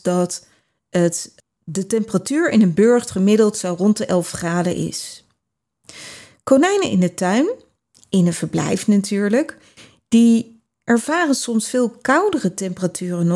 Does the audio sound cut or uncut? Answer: cut